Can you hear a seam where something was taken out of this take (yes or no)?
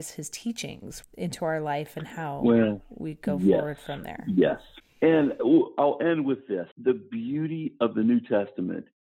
yes